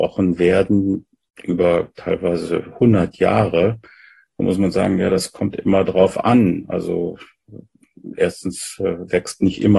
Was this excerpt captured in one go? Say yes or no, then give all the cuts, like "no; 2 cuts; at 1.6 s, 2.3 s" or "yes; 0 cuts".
yes; 0 cuts